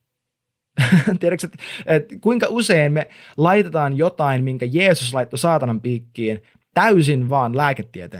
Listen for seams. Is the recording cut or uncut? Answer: uncut